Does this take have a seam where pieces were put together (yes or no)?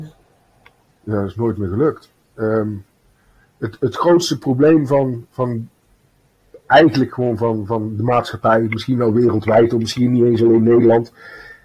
no